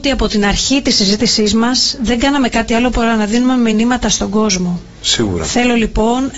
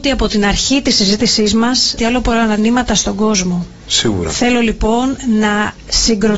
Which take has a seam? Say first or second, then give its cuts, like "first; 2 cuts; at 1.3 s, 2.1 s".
second; 2 cuts; at 2.0 s, 2.6 s